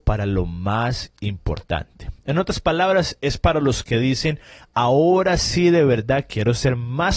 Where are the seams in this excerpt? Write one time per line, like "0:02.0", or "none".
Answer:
none

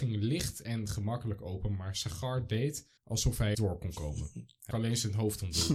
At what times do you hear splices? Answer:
0:03.0
0:03.5
0:04.7

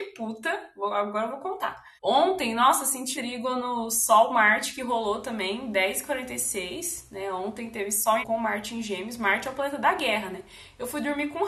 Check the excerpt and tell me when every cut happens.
0:02.0
0:03.1
0:08.2

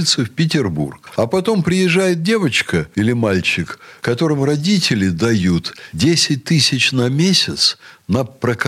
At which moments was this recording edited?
none

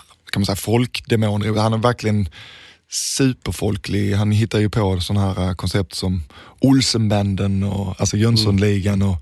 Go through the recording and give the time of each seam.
none

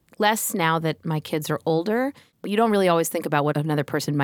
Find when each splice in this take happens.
none

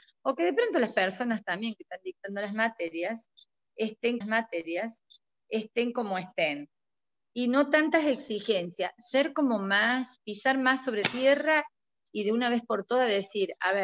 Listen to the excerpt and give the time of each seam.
0:04.2
0:10.2
0:11.0

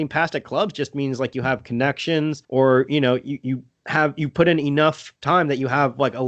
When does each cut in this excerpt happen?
0:02.4
0:05.2

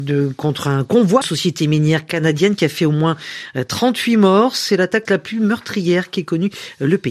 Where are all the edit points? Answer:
0:01.2
0:05.1

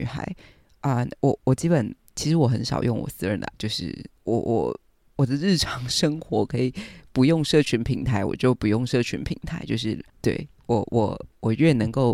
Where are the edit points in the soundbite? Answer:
0:03.5
0:04.2
0:10.1

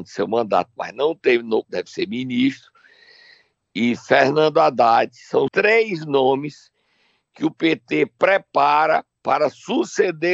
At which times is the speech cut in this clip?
0:01.6
0:05.5

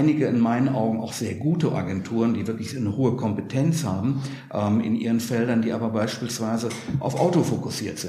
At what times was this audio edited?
none

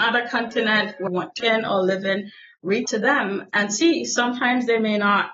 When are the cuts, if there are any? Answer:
0:01.1
0:01.4
0:02.9

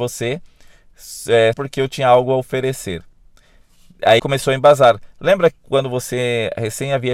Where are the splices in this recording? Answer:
0:01.5
0:04.2

